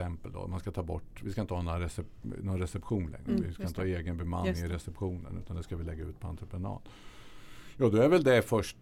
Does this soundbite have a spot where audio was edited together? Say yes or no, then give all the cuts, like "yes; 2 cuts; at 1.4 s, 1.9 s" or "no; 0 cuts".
no; 0 cuts